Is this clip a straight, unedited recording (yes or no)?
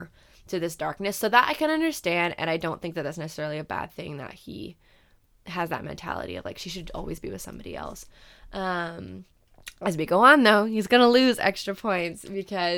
yes